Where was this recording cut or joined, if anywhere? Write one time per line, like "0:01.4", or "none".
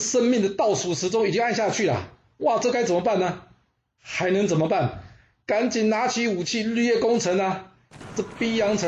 none